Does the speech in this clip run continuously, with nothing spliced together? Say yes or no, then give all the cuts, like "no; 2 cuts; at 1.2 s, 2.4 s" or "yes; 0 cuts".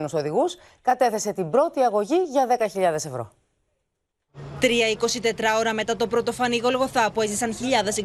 yes; 0 cuts